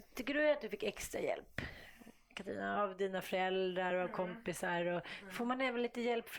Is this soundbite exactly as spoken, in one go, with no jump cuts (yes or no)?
yes